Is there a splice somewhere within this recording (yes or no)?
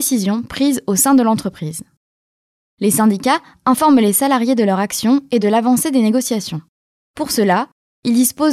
no